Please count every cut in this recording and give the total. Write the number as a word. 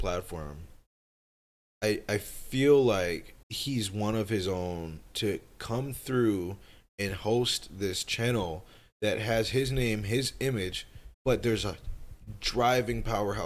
two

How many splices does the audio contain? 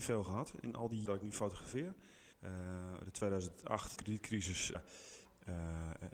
four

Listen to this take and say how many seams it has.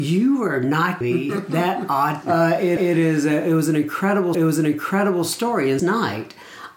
five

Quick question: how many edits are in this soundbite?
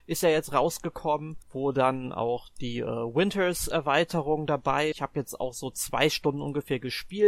two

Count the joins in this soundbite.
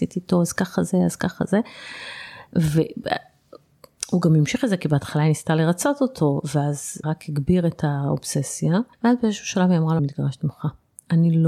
three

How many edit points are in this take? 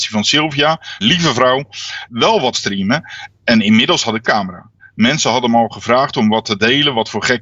four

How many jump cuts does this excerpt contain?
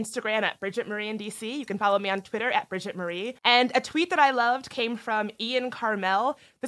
one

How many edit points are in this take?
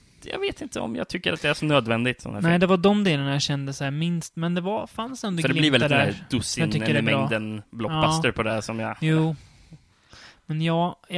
one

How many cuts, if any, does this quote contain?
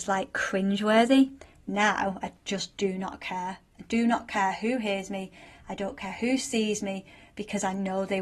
zero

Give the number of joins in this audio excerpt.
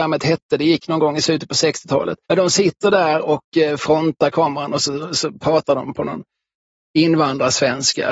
one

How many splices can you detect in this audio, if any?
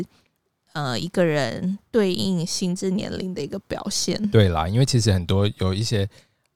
zero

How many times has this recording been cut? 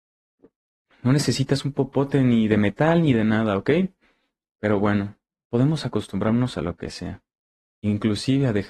zero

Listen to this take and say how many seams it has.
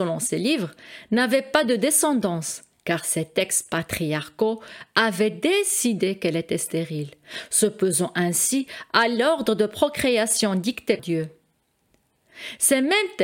one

